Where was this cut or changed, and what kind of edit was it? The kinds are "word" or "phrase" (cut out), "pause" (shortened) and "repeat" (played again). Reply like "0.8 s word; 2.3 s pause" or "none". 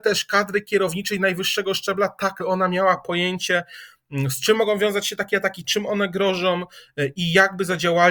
2.4 s word